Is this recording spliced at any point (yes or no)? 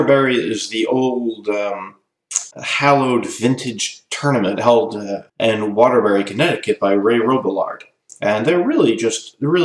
yes